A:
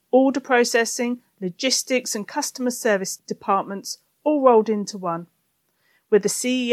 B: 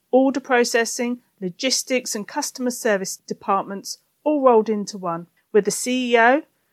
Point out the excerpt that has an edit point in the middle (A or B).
B